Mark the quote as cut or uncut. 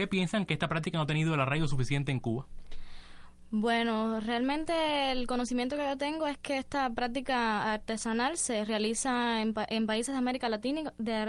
uncut